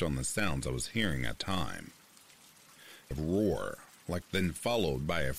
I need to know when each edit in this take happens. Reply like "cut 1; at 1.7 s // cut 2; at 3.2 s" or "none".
cut 1; at 1.4 s // cut 2; at 3.1 s // cut 3; at 4.2 s